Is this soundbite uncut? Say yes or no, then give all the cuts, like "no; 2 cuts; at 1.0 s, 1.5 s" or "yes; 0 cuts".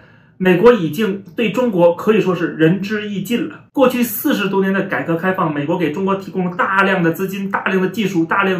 yes; 0 cuts